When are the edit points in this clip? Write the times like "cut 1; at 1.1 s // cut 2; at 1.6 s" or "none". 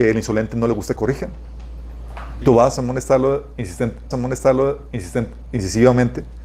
cut 1; at 1.0 s // cut 2; at 2.4 s // cut 3; at 4.1 s